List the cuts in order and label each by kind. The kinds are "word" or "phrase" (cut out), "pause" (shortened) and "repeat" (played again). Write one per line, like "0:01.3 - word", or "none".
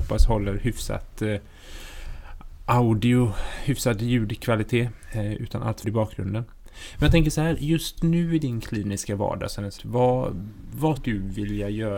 0:05.8 - phrase
0:08.0 - word
0:09.8 - word
0:11.0 - word